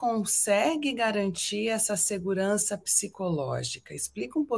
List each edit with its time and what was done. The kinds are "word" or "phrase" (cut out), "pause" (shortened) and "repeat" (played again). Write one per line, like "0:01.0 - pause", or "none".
none